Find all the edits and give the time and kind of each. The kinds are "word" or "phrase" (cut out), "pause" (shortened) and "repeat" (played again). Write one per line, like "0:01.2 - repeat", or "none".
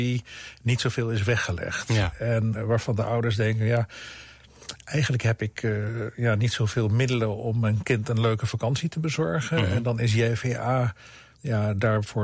0:02.5 - word